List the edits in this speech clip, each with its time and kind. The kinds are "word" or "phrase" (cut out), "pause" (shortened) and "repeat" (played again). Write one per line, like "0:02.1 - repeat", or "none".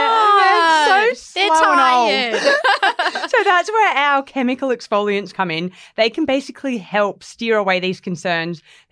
none